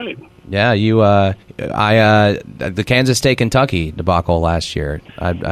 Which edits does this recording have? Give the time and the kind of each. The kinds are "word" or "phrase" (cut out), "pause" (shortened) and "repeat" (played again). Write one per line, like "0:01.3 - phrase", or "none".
0:01.4 - pause